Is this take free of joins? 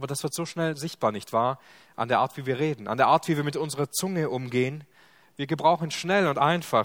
yes; 0 cuts

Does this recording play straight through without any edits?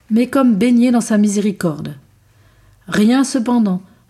yes; 0 cuts

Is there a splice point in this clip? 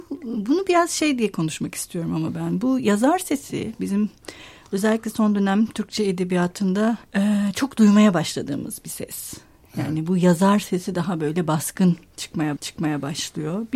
yes; 2 cuts; at 7.1 s, 12.6 s

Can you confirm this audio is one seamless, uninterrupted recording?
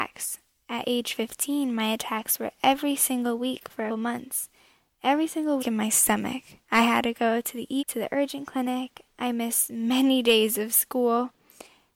no; 3 cuts; at 3.9 s, 5.6 s, 7.8 s

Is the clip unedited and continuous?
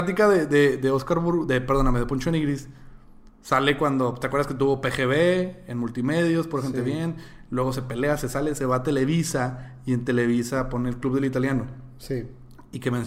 yes; 0 cuts

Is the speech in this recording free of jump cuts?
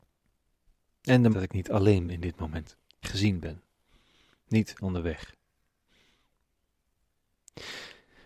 no; 4 cuts; at 1.3 s, 2.1 s, 3.0 s, 4.8 s

